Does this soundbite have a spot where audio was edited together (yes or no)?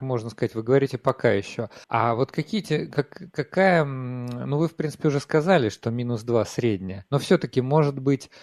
yes